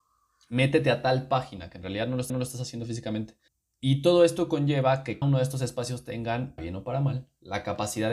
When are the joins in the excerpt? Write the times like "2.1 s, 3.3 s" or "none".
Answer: 2.3 s, 3.5 s, 5.2 s, 6.6 s

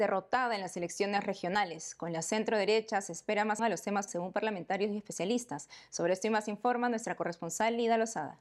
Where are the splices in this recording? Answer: 3.6 s, 4.1 s

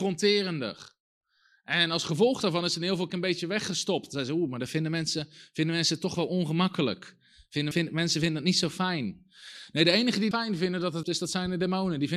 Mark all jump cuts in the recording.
3.1 s, 7.7 s, 10.3 s, 11.0 s

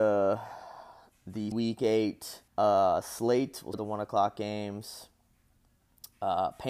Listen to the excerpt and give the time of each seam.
1.5 s, 2.5 s, 3.7 s

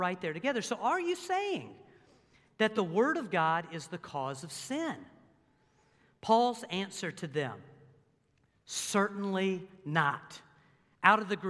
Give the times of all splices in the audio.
none

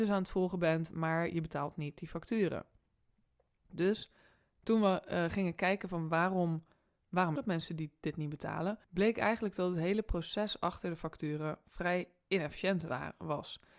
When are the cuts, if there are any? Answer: 7.4 s, 8.8 s

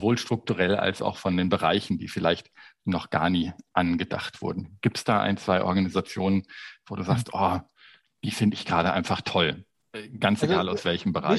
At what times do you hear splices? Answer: none

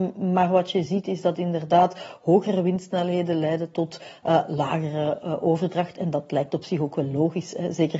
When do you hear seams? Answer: none

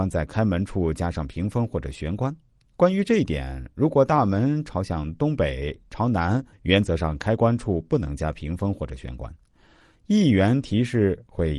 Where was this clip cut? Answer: 6.5 s

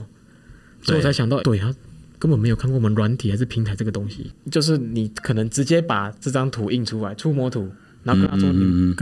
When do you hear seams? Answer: 1.4 s

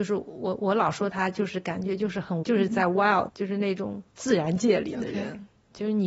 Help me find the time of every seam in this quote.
2.4 s, 3.3 s, 4.1 s

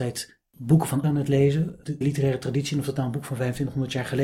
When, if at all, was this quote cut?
1.0 s, 2.0 s

